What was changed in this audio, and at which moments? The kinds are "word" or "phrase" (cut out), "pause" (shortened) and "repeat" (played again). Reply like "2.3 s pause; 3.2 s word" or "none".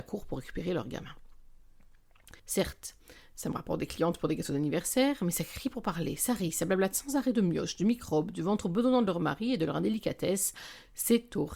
2.4 s pause